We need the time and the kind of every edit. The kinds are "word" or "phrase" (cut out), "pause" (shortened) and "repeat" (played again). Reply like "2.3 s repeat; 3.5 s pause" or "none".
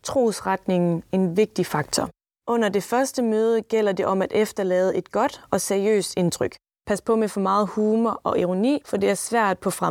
none

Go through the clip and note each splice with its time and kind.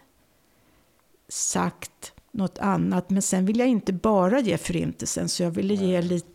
2.2 s pause

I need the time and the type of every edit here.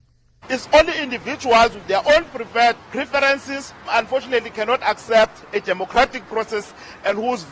3.9 s word

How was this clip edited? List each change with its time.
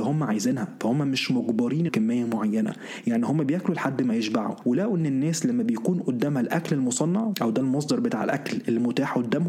1.9 s phrase

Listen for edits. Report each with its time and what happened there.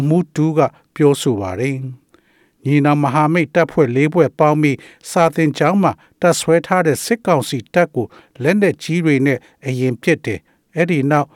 none

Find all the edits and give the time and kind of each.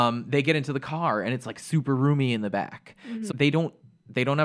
3.3 s word

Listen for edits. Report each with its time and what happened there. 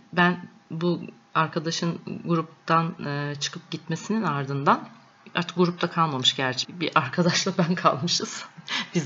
6.6 s word

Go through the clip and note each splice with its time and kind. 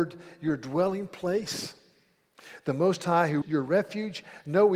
3.4 s word

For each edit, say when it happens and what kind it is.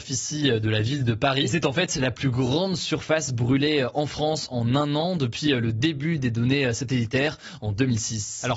none

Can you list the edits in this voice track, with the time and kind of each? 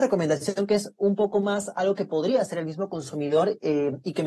none

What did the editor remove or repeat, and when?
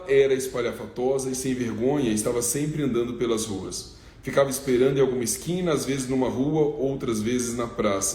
none

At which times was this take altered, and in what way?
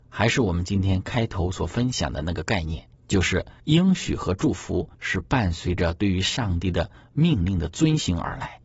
3.0 s pause; 3.6 s pause; 4.9 s pause

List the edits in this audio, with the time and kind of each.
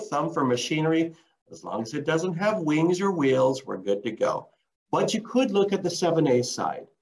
none

